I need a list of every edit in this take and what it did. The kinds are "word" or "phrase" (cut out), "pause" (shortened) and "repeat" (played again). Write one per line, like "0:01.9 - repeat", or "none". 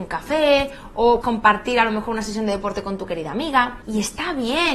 0:01.2 - word

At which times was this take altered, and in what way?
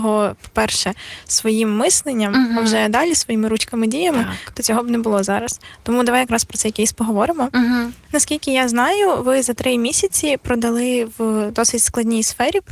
none

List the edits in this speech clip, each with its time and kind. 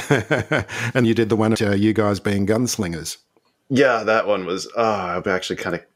0:01.0 - word
0:01.5 - word

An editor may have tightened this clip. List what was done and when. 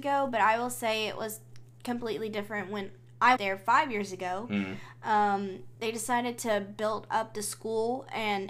0:03.4 - word
0:05.8 - word

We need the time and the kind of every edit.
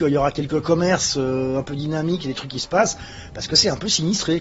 none

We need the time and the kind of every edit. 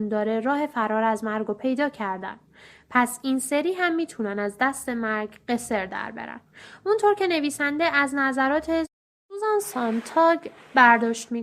none

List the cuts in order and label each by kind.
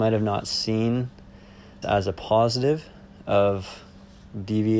0:01.8 - phrase

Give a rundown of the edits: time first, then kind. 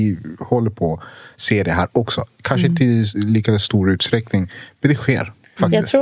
none

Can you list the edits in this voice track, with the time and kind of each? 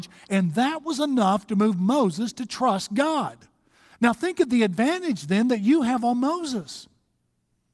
none

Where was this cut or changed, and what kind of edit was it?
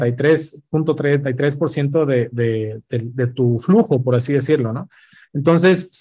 none

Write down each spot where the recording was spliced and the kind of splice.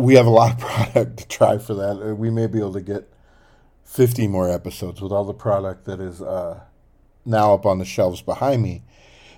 none

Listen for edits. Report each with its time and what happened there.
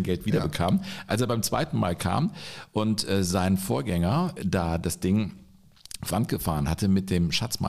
0:04.4 - word
0:06.1 - word

